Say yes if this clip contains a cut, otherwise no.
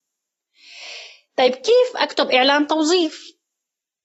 no